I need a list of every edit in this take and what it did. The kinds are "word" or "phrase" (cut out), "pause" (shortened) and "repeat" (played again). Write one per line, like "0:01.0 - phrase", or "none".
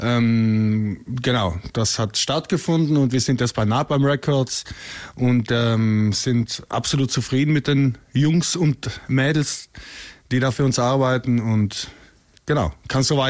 none